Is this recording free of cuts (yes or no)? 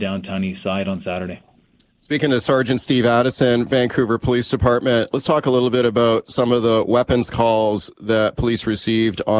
yes